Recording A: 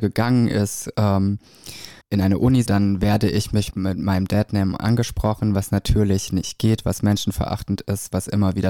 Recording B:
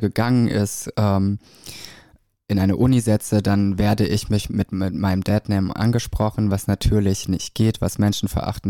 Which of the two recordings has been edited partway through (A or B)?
A